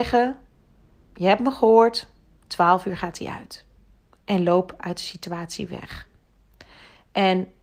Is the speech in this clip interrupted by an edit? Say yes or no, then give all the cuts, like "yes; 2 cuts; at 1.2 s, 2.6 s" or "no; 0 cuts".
no; 0 cuts